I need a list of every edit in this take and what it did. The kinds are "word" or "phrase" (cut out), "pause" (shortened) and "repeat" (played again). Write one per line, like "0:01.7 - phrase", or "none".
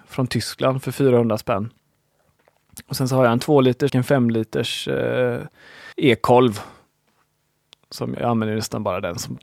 0:03.9 - word
0:05.9 - pause
0:08.2 - word

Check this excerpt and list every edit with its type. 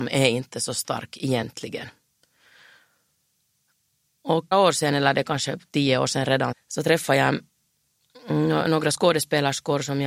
0:04.5 - phrase
0:06.5 - word

